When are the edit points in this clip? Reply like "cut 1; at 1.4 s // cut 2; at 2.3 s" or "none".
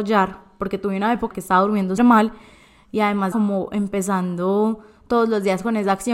cut 1; at 1.3 s // cut 2; at 2.0 s // cut 3; at 3.3 s